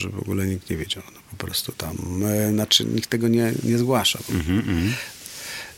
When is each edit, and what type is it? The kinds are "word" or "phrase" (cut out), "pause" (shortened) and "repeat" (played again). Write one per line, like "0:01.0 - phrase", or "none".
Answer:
none